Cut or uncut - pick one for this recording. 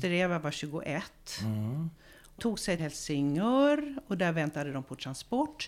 cut